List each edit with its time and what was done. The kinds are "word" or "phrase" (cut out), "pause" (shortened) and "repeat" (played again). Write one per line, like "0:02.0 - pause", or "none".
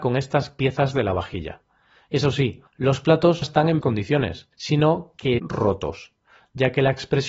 0:02.7 - pause
0:03.4 - word
0:03.8 - word
0:04.5 - pause
0:05.4 - word